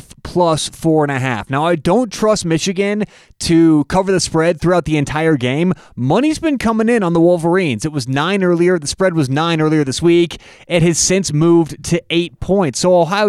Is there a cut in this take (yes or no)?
no